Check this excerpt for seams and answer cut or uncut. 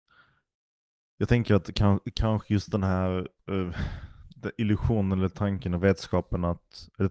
uncut